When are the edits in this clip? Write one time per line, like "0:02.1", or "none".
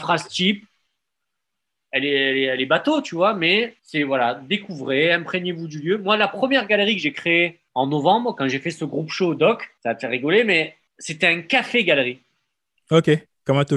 0:03.8
0:07.7
0:09.8
0:10.9